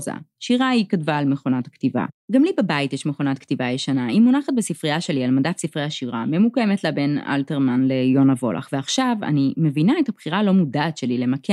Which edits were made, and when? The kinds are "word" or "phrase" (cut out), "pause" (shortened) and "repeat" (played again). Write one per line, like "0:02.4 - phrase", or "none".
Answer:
0:02.2 - pause